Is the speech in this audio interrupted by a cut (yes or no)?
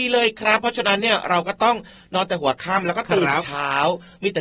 no